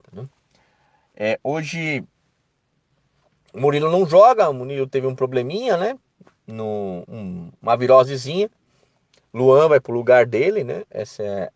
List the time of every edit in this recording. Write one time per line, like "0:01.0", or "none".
none